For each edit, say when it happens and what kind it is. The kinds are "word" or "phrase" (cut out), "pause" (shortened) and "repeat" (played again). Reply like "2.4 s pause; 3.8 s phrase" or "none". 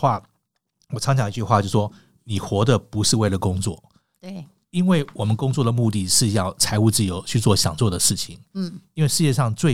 none